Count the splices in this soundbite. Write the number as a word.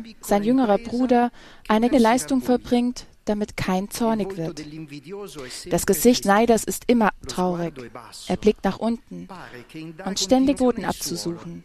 four